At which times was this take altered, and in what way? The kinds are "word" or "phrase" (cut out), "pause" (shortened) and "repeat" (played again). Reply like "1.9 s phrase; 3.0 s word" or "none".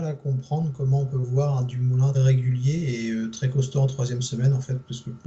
2.1 s word